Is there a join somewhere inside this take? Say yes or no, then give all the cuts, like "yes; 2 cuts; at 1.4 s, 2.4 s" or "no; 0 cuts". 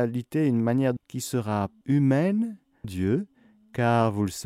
yes; 3 cuts; at 1.0 s, 1.8 s, 2.8 s